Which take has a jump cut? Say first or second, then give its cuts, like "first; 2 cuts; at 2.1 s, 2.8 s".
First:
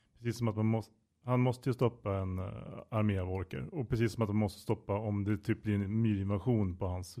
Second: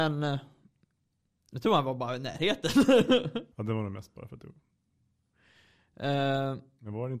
second; 1 cut; at 3.5 s